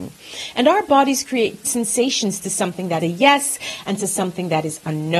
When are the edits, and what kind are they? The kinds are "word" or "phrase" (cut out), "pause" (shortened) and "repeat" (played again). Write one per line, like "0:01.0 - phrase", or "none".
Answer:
0:01.6 - word
0:03.0 - word